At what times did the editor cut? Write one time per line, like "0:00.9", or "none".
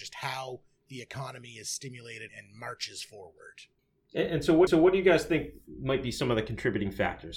0:02.3
0:04.7